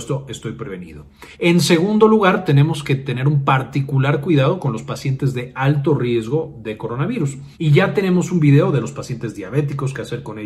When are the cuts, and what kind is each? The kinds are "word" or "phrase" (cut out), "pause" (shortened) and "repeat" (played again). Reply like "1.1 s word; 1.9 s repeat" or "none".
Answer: 1.3 s pause; 7.5 s pause